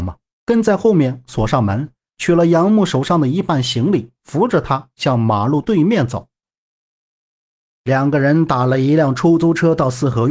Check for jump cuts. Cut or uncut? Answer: uncut